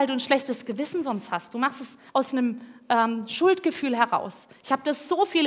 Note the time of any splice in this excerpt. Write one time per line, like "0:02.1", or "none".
0:02.1